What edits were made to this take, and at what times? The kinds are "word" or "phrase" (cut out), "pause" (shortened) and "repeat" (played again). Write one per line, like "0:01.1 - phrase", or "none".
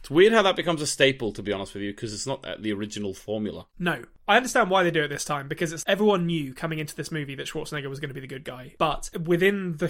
0:05.8 - word